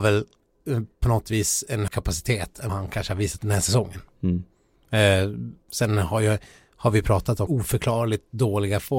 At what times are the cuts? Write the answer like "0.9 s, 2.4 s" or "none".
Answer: 1.9 s, 2.7 s, 3.4 s, 5.6 s, 7.5 s